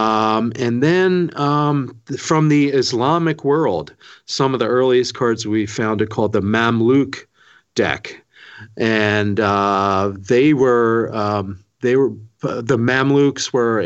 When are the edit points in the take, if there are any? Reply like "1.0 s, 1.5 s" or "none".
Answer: none

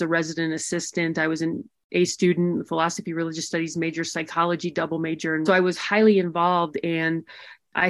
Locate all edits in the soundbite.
5.5 s

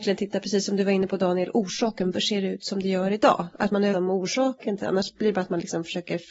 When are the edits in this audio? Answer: 2.1 s, 3.9 s, 4.8 s

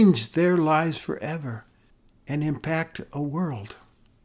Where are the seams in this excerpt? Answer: 1.9 s

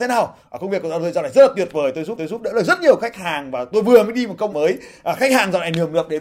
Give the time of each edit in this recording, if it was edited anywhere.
2.2 s, 4.5 s

